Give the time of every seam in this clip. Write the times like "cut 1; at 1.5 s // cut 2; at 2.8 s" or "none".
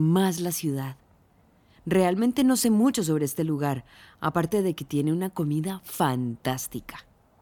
none